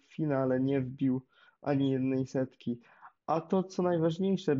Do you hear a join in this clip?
no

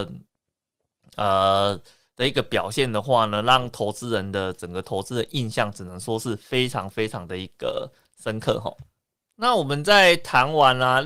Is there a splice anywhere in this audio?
no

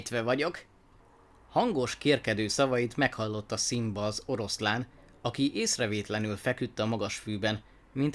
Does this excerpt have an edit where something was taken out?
no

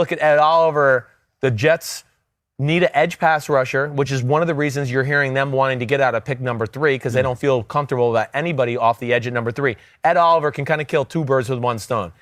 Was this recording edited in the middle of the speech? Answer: no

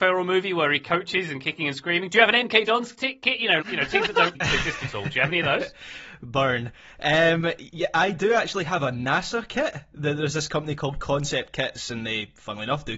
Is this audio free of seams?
no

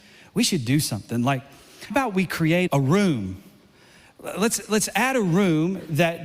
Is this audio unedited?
no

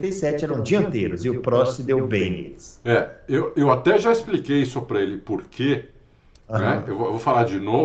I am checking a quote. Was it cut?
no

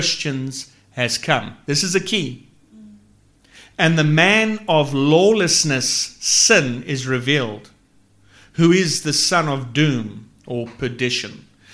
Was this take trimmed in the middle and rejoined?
no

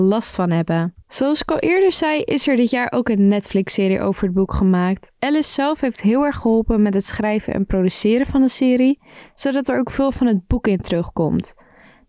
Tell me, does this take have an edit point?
yes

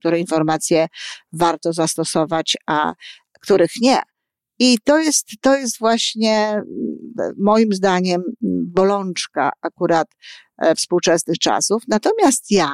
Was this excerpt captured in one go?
yes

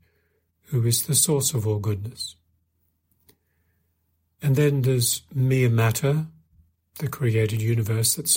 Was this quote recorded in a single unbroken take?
yes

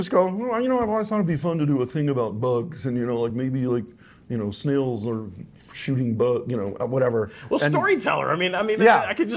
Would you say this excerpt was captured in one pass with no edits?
yes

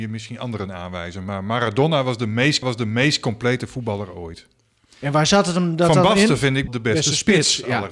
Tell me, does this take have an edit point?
yes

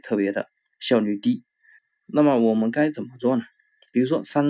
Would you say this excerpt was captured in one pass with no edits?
no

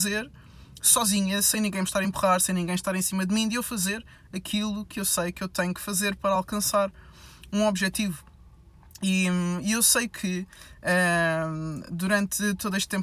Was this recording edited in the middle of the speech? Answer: no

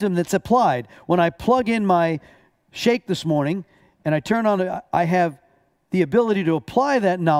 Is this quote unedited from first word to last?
yes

